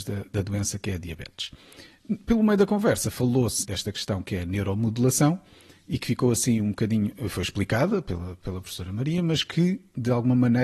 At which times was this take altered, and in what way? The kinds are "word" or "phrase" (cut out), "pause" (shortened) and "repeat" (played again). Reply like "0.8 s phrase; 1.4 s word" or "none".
3.6 s word